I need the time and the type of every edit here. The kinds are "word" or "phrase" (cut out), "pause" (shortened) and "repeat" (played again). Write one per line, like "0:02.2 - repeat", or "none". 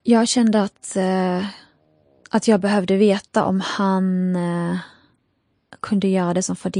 none